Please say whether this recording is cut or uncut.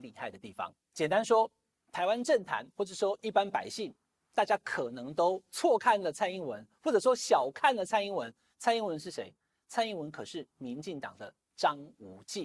uncut